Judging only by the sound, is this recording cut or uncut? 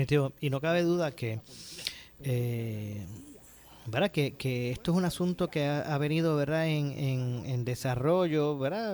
uncut